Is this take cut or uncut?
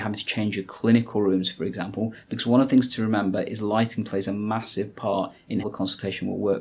cut